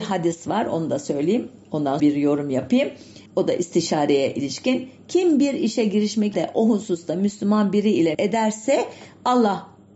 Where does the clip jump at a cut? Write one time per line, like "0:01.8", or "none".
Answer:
0:02.0
0:03.3
0:06.3
0:08.1